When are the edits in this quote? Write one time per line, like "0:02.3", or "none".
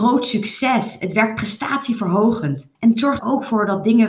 0:02.7
0:03.2